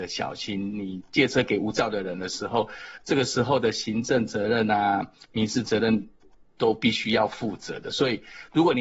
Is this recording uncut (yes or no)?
yes